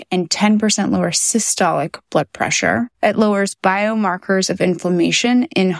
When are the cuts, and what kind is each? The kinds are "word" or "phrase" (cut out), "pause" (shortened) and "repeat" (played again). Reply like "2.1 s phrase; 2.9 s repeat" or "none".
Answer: 2.9 s pause